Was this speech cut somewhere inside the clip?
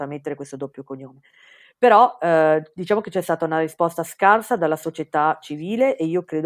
no; 0 cuts

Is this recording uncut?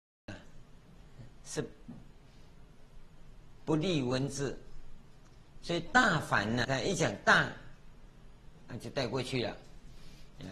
no; 1 cut; at 6.6 s

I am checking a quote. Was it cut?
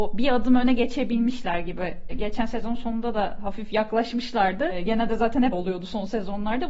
yes; 2 cuts; at 2.1 s, 5.5 s

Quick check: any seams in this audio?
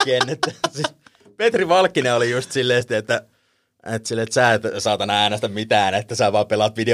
no; 0 cuts

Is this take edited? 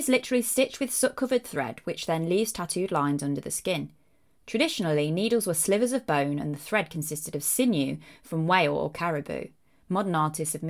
no; 0 cuts

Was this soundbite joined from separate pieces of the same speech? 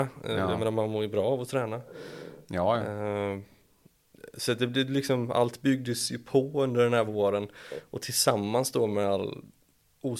no; 0 cuts

